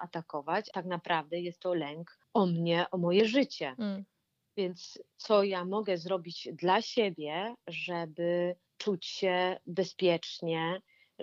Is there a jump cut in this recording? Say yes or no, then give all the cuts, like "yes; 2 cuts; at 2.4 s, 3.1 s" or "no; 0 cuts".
no; 0 cuts